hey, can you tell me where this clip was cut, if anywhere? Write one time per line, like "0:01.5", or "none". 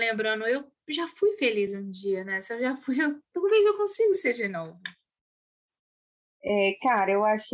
none